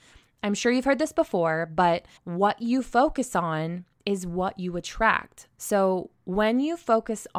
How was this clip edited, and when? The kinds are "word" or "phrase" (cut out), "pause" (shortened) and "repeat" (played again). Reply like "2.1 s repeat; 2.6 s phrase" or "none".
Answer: 2.2 s pause